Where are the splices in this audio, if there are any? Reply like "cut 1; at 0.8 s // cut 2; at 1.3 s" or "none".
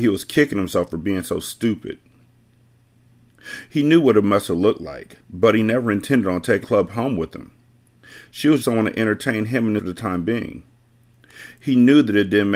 cut 1; at 5.2 s // cut 2; at 6.6 s // cut 3; at 8.6 s // cut 4; at 9.8 s